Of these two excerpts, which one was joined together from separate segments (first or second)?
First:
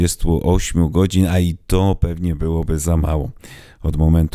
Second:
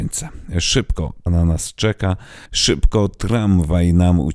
second